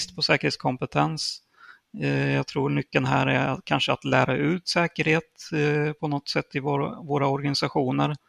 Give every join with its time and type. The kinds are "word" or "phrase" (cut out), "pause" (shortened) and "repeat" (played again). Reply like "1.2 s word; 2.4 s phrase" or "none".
none